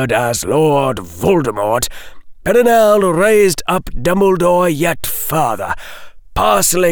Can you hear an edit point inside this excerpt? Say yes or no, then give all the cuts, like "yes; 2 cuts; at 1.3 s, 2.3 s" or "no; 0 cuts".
no; 0 cuts